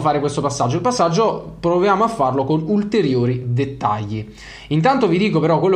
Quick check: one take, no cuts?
yes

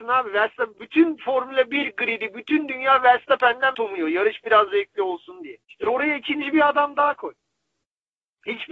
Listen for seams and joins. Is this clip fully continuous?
no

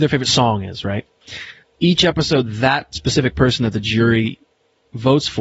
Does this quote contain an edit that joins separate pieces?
no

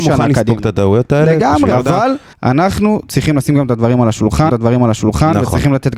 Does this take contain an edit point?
yes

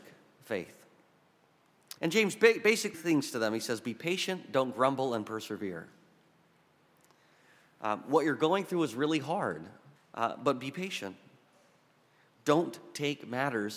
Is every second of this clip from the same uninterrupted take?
no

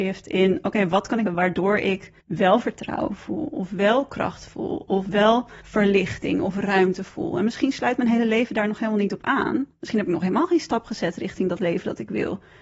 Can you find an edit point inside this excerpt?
yes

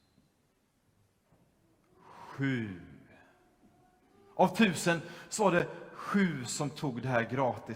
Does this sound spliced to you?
no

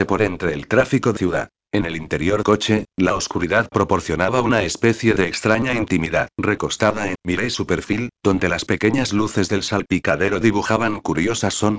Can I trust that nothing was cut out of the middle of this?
no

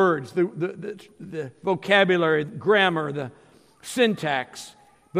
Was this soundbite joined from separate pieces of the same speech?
yes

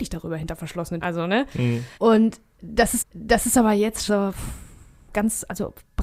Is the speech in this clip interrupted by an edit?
yes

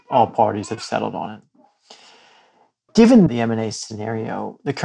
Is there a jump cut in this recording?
no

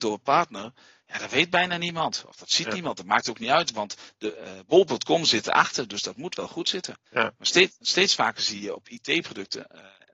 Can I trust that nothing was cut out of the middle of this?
no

